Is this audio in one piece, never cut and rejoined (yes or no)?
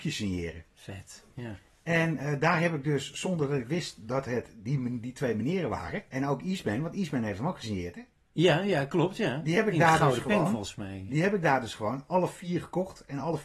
no